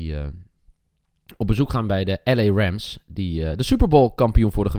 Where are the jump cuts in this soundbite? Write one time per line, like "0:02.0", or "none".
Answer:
none